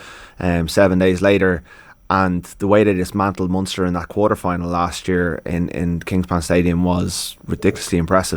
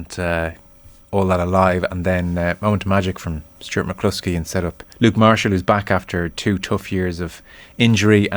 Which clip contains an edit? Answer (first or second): second